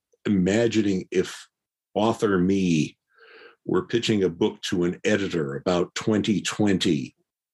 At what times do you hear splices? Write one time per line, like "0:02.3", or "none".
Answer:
none